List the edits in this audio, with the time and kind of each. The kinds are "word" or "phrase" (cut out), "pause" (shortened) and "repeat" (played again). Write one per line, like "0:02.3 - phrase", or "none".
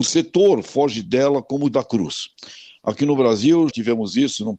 0:01.7 - word
0:03.7 - word